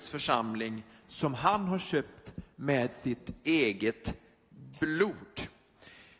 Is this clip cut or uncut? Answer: uncut